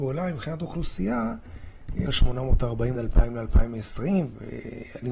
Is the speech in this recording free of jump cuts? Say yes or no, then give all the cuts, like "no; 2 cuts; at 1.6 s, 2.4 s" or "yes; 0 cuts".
no; 2 cuts; at 2.1 s, 2.9 s